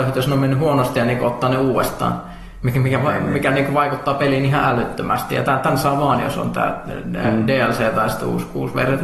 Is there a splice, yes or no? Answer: no